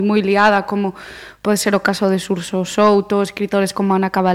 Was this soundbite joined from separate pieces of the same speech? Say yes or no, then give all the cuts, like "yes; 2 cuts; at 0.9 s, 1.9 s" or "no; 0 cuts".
no; 0 cuts